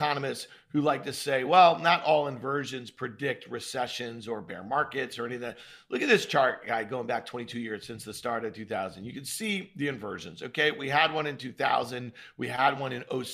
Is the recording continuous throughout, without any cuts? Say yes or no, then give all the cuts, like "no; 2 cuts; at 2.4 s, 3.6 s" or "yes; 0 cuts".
yes; 0 cuts